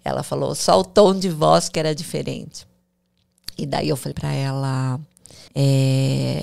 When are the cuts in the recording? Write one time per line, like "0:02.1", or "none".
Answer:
0:04.1
0:05.5